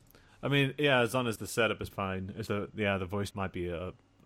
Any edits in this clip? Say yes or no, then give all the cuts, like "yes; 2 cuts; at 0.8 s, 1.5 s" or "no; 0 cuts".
yes; 4 cuts; at 1.4 s, 1.9 s, 2.5 s, 3.3 s